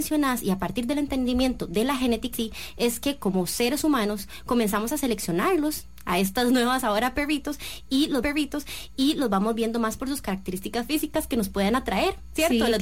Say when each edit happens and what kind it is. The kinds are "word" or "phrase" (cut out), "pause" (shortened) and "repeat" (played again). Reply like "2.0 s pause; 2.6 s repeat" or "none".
2.3 s word; 8.2 s repeat

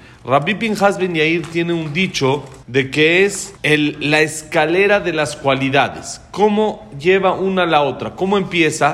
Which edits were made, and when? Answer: 2.6 s pause; 3.6 s pause

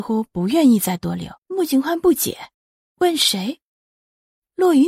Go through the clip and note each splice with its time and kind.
1.4 s pause; 2.5 s pause

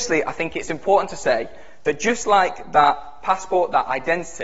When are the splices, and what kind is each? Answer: none

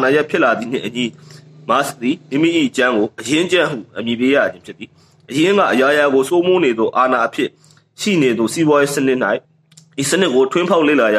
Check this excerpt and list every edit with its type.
9.4 s pause

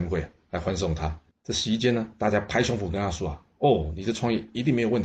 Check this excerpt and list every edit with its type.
1.3 s pause

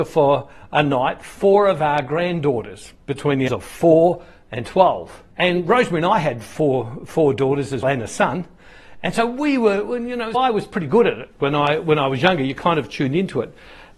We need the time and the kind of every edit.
3.5 s word; 5.3 s pause; 7.8 s word; 10.3 s word

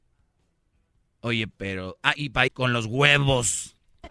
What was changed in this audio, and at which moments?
2.2 s word; 2.5 s word

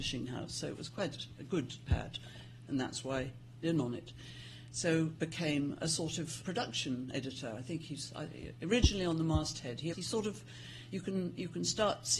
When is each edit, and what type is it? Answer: 1.9 s word; 3.6 s phrase; 5.2 s word; 6.4 s word; 9.9 s word

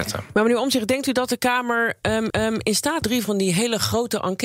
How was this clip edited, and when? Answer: 2.3 s repeat; 3.0 s phrase

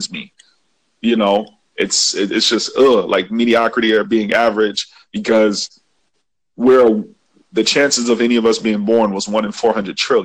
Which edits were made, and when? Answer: none

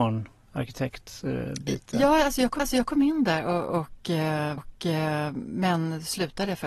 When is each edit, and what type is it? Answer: 2.6 s repeat; 4.6 s repeat

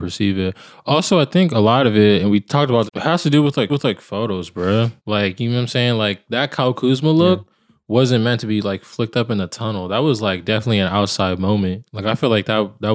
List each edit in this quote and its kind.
2.9 s phrase; 3.7 s repeat; 5.0 s pause

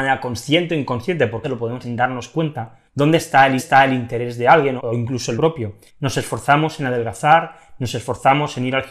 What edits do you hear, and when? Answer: 1.4 s word; 1.8 s word; 2.9 s pause; 3.6 s repeat; 4.8 s word; 5.4 s word; 5.9 s pause

